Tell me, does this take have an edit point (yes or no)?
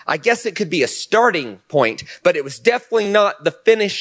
no